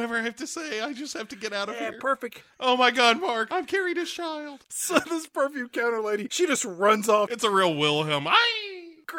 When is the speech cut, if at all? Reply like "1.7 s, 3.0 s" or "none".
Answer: 3.5 s